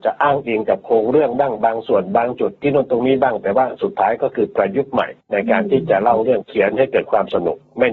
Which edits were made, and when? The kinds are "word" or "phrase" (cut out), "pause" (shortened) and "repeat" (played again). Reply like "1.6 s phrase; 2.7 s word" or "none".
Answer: 5.2 s pause